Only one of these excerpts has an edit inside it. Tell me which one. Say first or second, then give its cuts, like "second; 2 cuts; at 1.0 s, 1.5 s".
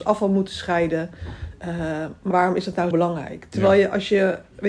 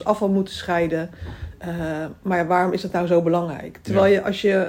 first; 2 cuts; at 2.3 s, 2.9 s